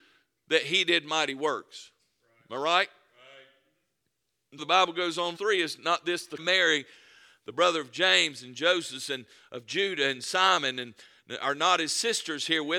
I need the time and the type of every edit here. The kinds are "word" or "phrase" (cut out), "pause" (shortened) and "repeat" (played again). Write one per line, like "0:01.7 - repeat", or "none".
0:04.6 - word
0:05.4 - word
0:06.4 - phrase